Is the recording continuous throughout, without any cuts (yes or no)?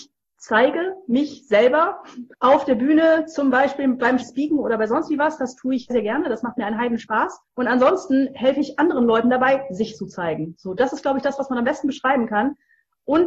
no